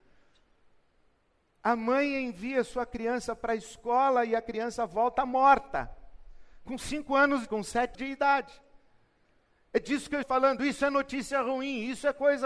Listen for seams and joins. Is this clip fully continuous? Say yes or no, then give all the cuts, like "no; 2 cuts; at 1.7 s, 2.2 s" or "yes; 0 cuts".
no; 3 cuts; at 7.5 s, 7.9 s, 10.2 s